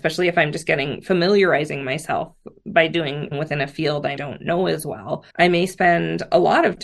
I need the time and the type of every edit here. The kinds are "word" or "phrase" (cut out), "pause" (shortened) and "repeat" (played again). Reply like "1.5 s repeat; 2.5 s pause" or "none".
3.3 s word; 4.2 s word; 5.3 s pause

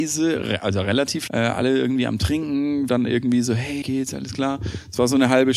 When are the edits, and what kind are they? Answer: 1.3 s word; 2.9 s word; 3.8 s word

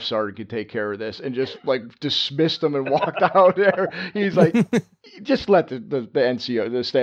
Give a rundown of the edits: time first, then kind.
none

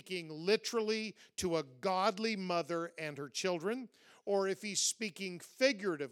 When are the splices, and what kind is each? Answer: none

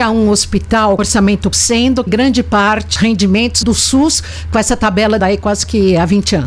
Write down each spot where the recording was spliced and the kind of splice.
1.0 s word; 1.5 s word; 2.1 s word; 3.0 s word; 3.6 s word; 5.2 s word

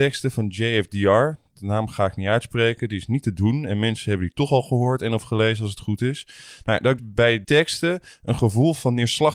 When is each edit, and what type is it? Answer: 7.0 s word; 7.4 s word

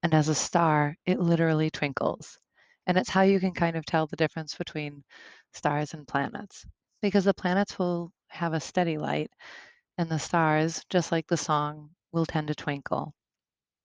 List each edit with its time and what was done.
none

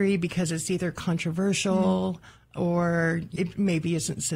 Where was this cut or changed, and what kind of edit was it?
3.4 s word

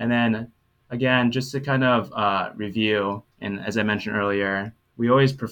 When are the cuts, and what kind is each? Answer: 3.3 s pause

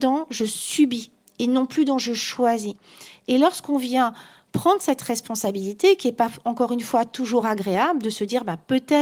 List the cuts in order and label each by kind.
none

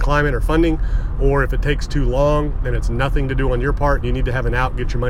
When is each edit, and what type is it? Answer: 4.0 s word

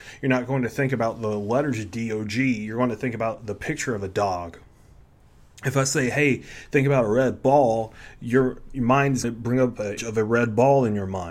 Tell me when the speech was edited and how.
9.2 s word; 10.0 s word

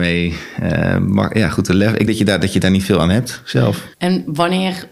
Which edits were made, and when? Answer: 2.1 s word; 3.9 s pause

